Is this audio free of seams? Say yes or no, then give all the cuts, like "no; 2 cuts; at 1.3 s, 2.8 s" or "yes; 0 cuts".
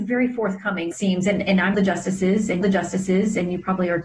no; 3 cuts; at 0.9 s, 1.7 s, 2.6 s